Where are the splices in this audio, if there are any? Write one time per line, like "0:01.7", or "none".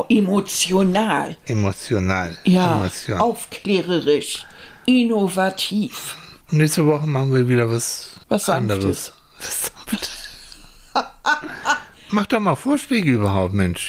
0:06.4
0:08.2